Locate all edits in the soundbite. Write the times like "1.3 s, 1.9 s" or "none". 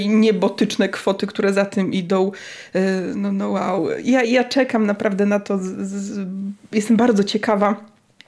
4.2 s